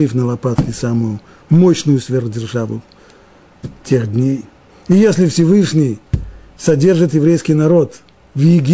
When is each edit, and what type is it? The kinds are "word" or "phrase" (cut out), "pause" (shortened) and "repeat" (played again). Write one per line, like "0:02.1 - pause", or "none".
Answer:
none